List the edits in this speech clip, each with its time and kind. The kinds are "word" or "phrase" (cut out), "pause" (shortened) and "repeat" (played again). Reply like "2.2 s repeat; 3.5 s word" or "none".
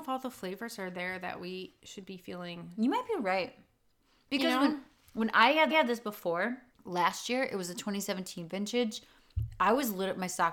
5.7 s repeat; 6.7 s pause